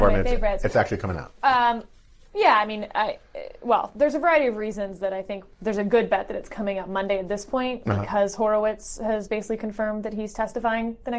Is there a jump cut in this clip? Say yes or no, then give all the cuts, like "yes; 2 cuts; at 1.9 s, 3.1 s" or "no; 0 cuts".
no; 0 cuts